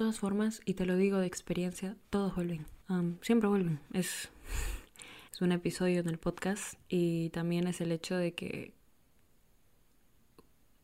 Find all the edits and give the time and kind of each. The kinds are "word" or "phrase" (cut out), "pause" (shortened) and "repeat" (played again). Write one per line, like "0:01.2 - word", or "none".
0:02.8 - pause
0:05.3 - pause